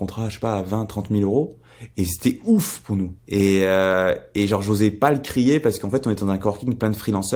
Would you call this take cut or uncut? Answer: cut